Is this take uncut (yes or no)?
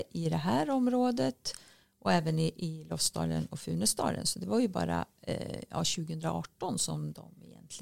yes